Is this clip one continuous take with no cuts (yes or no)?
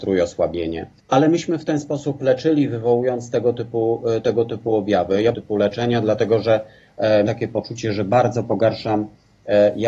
no